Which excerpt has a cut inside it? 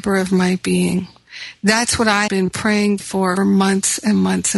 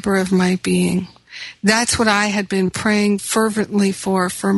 first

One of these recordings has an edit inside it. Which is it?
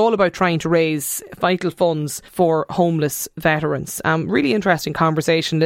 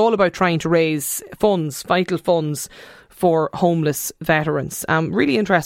first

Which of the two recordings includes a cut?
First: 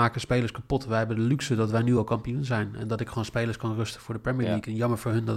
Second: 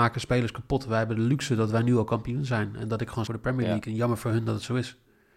second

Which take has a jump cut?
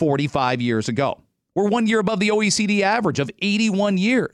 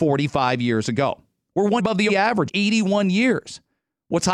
second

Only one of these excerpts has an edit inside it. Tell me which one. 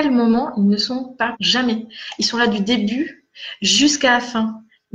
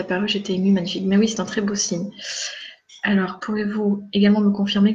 first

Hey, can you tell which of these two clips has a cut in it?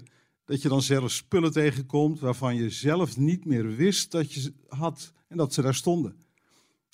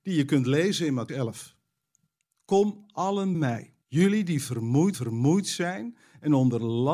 second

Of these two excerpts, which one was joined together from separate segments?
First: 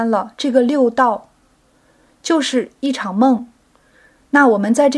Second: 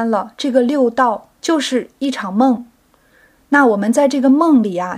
second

